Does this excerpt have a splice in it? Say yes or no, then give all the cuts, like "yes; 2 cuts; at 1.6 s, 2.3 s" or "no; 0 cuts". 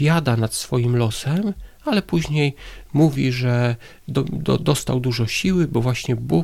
no; 0 cuts